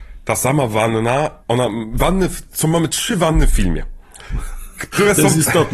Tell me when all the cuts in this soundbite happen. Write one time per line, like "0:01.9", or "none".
0:01.4